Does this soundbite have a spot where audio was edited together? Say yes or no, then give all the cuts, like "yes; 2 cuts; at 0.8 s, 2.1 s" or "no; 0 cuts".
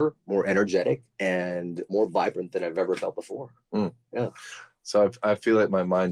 yes; 1 cut; at 1.1 s